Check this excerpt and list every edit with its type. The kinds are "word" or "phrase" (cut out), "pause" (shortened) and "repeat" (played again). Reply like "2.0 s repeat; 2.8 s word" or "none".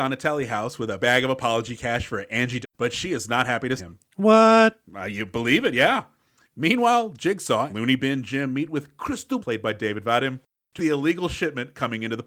1.0 s word; 2.6 s word; 3.8 s word; 7.7 s word; 9.4 s word; 10.8 s word